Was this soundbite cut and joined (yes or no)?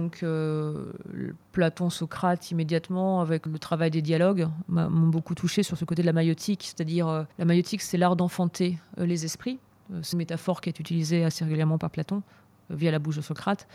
yes